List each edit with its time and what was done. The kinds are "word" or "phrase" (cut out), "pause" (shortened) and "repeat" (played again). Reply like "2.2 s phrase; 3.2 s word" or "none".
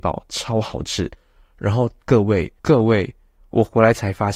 2.6 s pause